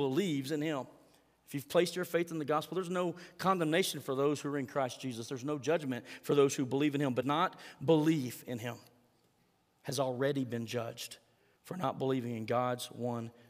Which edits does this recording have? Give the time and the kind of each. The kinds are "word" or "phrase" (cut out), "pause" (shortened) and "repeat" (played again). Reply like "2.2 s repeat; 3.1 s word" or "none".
7.2 s phrase